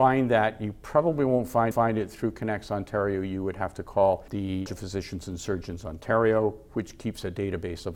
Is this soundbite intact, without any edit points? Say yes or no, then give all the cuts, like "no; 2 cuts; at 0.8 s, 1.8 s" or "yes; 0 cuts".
no; 2 cuts; at 1.7 s, 4.7 s